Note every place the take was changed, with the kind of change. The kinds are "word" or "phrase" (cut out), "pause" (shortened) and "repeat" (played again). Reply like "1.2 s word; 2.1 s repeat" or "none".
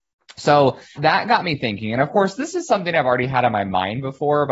1.0 s word